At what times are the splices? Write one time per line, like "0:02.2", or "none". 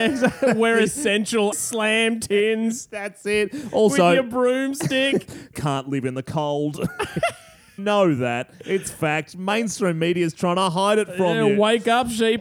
0:01.5
0:05.5
0:07.8